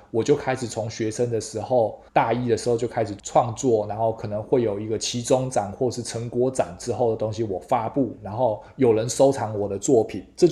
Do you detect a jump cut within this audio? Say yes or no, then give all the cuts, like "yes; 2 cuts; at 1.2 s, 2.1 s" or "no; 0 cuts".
yes; 1 cut; at 2.1 s